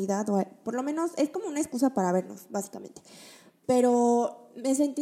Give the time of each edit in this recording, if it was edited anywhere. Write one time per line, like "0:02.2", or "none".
none